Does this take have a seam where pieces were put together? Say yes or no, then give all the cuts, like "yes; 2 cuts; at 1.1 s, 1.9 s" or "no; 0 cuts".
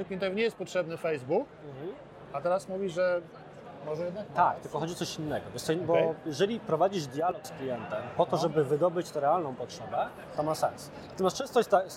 no; 0 cuts